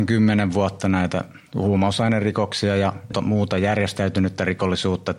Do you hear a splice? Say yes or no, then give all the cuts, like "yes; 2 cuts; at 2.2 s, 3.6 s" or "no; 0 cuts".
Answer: yes; 2 cuts; at 1.5 s, 3.1 s